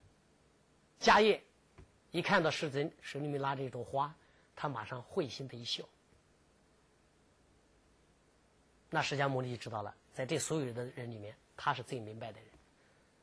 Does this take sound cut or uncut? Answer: uncut